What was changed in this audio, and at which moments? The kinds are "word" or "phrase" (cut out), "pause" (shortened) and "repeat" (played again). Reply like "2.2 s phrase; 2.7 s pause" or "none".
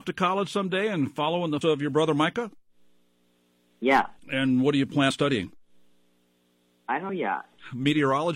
1.6 s word; 4.2 s pause; 5.1 s word; 7.1 s word